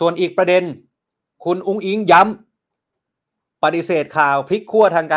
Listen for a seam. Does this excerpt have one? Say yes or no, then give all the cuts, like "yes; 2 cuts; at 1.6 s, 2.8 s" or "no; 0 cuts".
no; 0 cuts